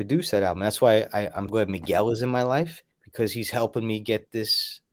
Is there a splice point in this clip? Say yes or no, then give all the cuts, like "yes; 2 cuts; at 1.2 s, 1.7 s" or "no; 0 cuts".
yes; 2 cuts; at 1.5 s, 2.9 s